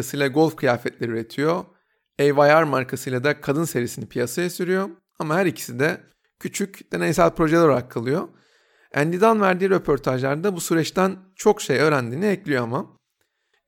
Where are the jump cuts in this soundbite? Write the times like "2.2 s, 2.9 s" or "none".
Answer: none